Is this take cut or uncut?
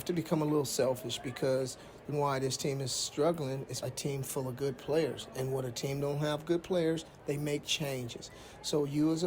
cut